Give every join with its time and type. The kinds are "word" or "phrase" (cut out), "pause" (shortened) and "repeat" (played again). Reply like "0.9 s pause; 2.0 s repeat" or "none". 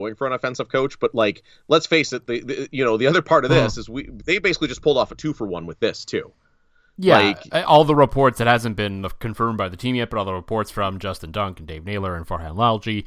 none